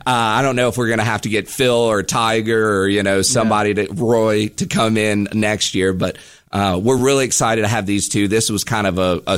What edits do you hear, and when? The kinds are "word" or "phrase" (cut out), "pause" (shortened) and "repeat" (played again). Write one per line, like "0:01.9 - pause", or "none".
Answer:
none